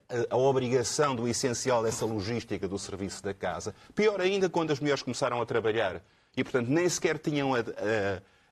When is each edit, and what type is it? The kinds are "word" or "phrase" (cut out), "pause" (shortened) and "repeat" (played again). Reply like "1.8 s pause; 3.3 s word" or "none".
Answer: none

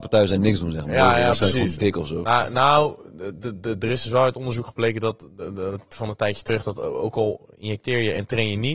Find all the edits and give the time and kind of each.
none

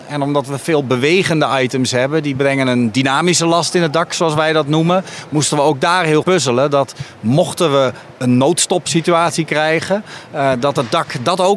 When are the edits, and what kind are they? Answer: 6.2 s word

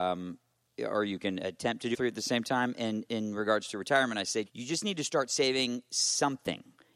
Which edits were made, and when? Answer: 1.9 s word; 4.5 s word

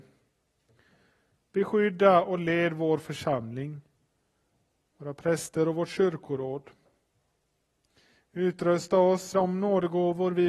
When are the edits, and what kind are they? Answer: 9.3 s word

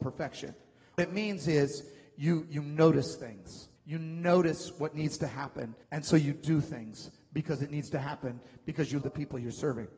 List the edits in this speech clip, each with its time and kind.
1.0 s word; 3.8 s pause; 5.8 s pause; 9.0 s word

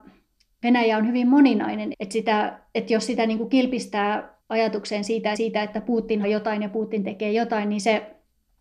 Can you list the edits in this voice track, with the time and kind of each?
1.9 s word; 4.4 s pause; 5.3 s repeat; 6.2 s word

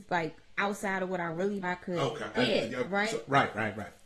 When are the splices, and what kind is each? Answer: 1.6 s word; 2.3 s word; 2.8 s word

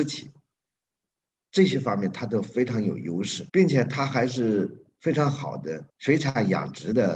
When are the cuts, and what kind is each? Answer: 3.5 s pause; 5.9 s pause

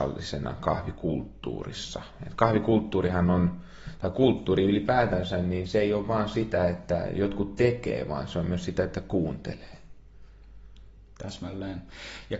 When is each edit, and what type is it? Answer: none

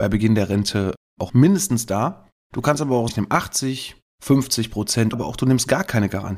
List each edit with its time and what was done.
1.3 s word; 3.1 s word; 5.1 s word

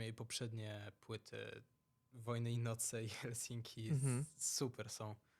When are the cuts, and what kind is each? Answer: none

